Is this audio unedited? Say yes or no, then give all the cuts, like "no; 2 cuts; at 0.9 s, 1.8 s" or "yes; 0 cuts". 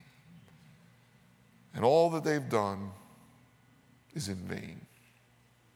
yes; 0 cuts